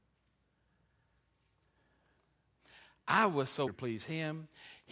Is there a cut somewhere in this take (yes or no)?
yes